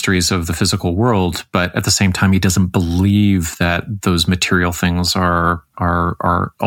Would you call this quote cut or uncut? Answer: uncut